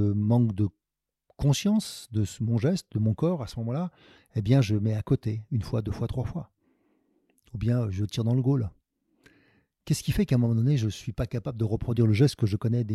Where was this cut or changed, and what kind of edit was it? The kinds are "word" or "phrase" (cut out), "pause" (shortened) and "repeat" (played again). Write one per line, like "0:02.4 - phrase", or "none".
none